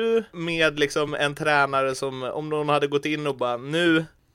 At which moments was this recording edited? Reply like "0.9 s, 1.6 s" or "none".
none

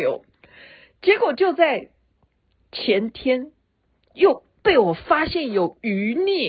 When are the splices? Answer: none

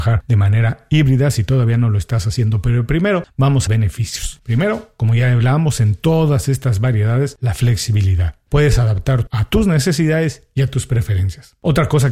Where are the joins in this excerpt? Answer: 3.7 s, 9.3 s

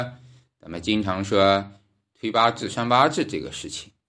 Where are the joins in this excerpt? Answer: none

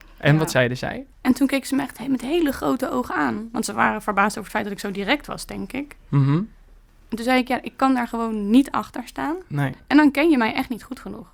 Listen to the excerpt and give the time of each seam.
1.1 s

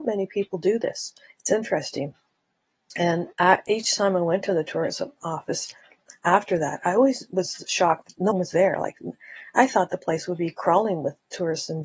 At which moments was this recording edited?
1.3 s, 3.3 s, 6.8 s, 8.3 s

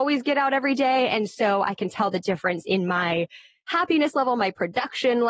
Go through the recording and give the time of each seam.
none

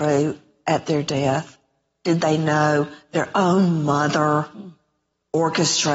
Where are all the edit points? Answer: none

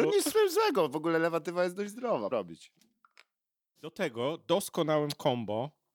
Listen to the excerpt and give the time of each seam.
2.3 s

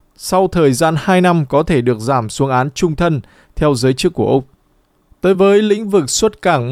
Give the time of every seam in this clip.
none

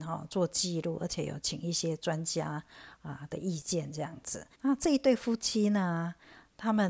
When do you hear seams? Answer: 4.5 s

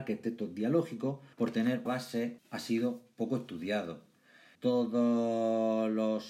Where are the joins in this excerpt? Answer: 1.3 s, 1.9 s, 2.4 s, 4.5 s

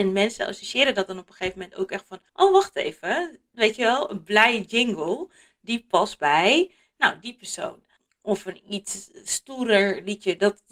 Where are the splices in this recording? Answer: 2.3 s

